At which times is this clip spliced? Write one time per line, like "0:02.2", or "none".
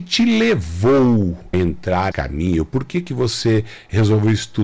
0:01.5
0:02.1